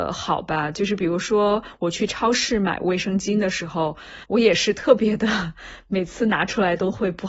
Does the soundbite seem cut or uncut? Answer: cut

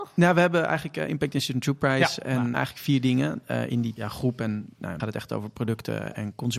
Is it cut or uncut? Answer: cut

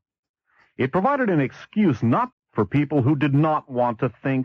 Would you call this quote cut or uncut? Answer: cut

